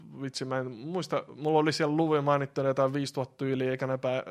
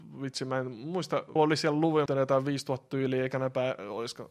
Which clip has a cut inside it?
second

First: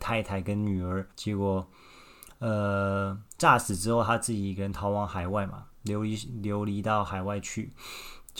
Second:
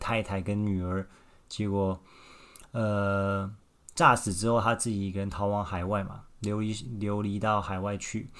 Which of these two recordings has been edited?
first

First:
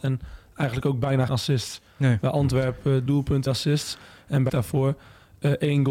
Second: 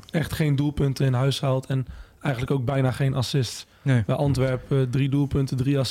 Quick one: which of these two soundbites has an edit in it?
first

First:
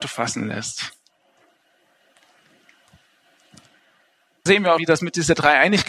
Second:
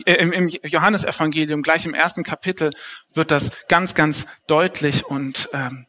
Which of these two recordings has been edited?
first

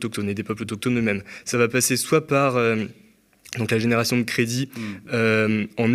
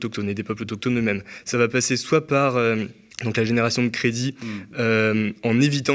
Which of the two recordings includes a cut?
second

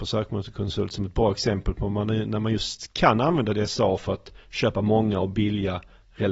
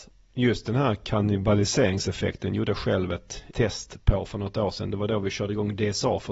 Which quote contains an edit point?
second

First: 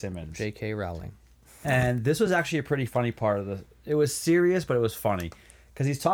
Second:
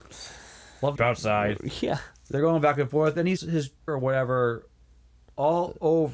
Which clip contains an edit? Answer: second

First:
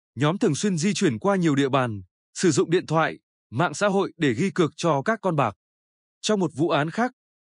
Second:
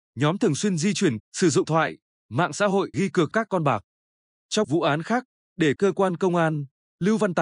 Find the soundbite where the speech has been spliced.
second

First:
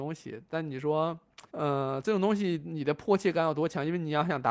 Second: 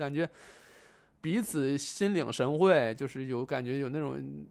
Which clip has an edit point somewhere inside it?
first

